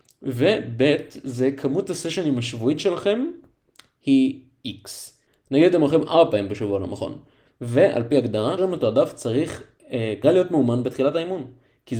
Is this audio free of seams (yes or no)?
no